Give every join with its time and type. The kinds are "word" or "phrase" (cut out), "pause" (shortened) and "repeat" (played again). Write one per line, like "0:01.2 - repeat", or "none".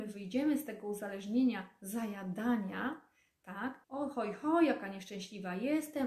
0:03.8 - pause